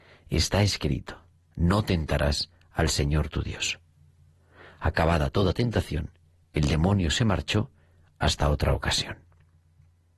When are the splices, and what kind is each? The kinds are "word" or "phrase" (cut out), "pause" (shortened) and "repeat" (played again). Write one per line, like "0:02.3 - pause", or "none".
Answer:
none